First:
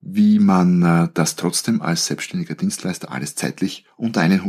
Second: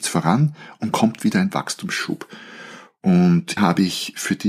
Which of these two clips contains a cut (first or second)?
second